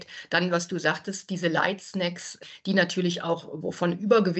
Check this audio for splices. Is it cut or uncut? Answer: uncut